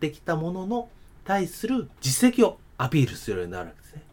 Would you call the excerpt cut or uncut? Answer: cut